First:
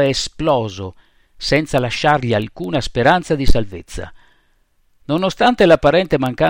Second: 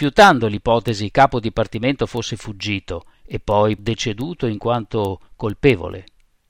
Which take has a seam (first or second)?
second